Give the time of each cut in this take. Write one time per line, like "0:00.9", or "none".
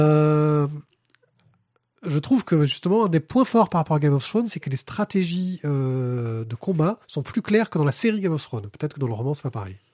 0:07.0